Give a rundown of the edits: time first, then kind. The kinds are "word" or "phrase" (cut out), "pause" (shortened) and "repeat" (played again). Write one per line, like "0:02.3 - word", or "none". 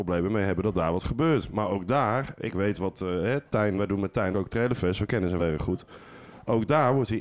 0:03.8 - word
0:04.3 - word
0:05.4 - word